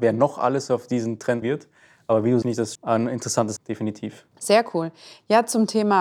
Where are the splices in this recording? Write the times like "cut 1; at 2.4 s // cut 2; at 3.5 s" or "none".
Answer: cut 1; at 1.4 s // cut 2; at 2.4 s // cut 3; at 2.7 s // cut 4; at 3.6 s